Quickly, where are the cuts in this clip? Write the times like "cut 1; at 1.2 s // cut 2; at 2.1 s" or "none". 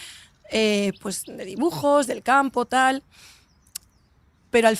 none